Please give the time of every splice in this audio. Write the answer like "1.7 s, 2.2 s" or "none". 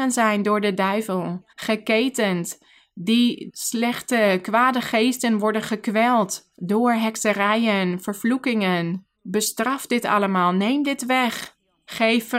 1.5 s, 3.5 s, 6.5 s, 9.1 s